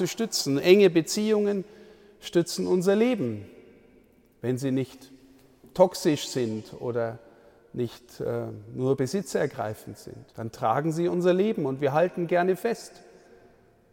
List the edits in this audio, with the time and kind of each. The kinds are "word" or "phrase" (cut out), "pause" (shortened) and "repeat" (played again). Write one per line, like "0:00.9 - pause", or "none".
0:10.3 - pause